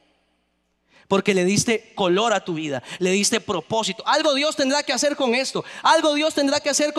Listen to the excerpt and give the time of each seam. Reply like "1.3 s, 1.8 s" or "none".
none